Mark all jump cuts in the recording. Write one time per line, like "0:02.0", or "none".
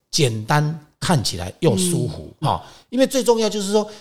0:02.4